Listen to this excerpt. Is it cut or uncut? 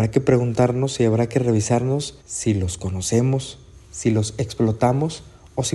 cut